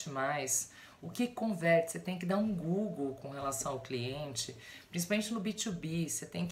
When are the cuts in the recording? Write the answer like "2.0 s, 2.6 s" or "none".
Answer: none